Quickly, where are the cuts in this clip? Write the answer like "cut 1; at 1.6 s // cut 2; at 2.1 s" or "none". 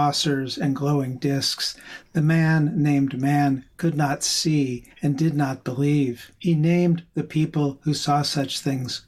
cut 1; at 4.9 s // cut 2; at 6.4 s